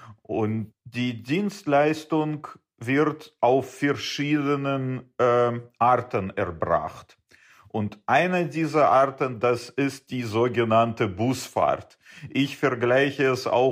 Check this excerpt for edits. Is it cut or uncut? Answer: uncut